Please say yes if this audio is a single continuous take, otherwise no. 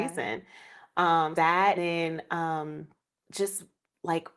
no